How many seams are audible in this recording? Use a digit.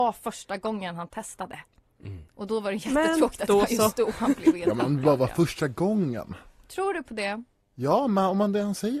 0